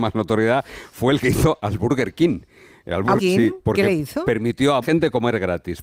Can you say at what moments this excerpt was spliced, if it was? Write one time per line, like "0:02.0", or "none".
0:03.2
0:04.8